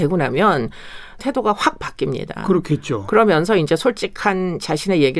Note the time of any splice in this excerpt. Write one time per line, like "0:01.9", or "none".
0:01.2